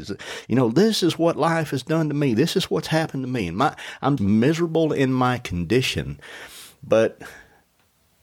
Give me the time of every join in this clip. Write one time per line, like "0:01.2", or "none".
0:04.2